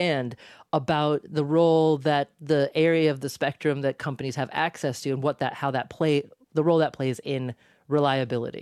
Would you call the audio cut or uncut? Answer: uncut